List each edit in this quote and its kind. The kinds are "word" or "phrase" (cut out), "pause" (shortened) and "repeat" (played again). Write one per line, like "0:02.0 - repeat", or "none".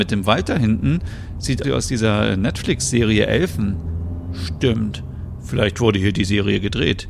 0:01.6 - word